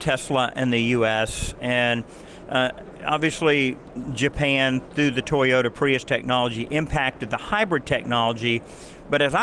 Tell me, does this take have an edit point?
no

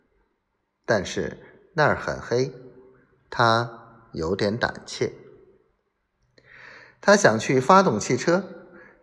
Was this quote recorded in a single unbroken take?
yes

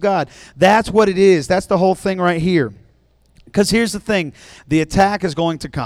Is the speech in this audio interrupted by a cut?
no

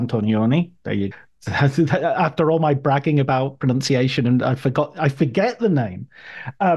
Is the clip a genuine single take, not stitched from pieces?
no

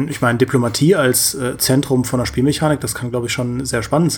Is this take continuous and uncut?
yes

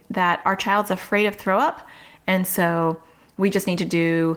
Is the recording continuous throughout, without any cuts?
yes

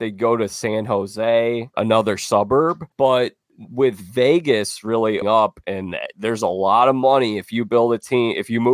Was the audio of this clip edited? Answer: yes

